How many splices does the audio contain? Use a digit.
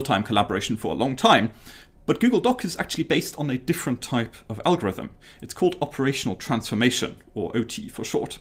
0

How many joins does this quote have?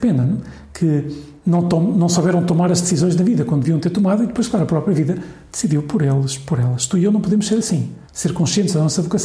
1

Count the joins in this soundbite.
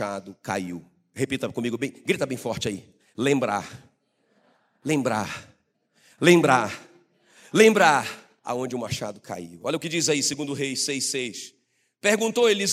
1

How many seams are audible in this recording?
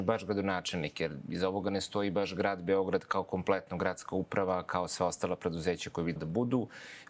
1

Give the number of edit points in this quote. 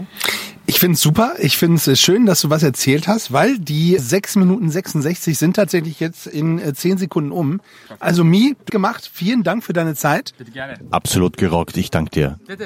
2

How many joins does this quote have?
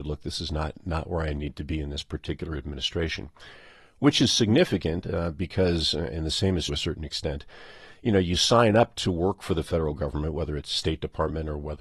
1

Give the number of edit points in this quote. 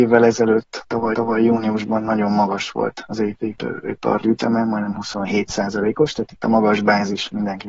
2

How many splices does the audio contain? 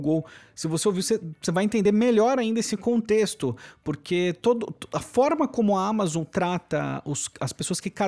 0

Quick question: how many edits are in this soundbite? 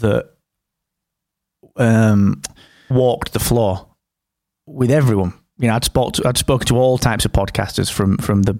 1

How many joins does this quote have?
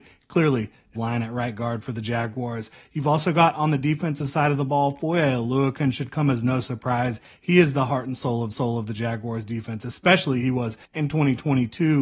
3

